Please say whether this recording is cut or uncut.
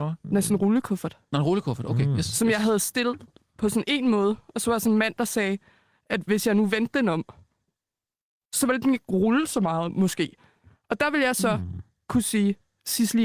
uncut